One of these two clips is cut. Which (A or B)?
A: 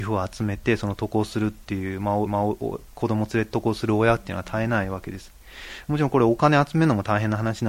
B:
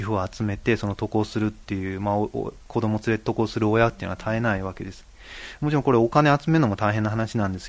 A